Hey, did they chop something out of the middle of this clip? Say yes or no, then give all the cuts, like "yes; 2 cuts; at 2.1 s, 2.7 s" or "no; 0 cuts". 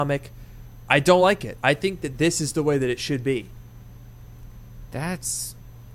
no; 0 cuts